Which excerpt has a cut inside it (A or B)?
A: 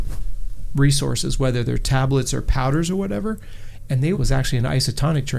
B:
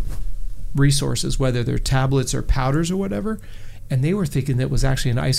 A